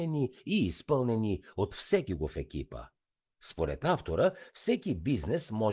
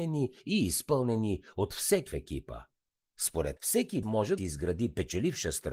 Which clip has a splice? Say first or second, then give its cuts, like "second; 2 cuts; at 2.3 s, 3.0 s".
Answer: second; 4 cuts; at 2.1 s, 3.6 s, 4.0 s, 4.4 s